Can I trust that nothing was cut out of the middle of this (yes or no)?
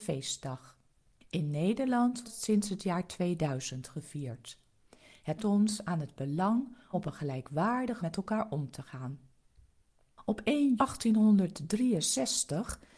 no